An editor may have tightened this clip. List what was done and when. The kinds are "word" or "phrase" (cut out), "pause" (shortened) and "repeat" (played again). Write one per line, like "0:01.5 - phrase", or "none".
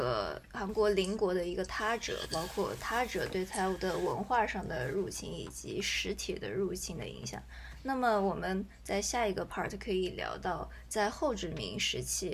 none